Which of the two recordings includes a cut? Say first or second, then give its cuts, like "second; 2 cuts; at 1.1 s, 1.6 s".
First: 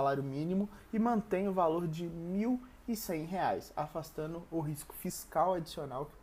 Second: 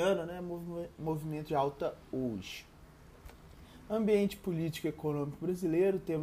second; 1 cut; at 1.5 s